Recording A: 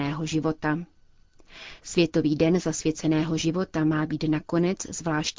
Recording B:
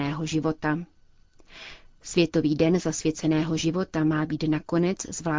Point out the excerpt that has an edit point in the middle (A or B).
A